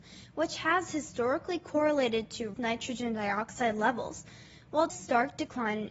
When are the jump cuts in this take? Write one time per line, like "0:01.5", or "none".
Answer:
0:02.5
0:04.9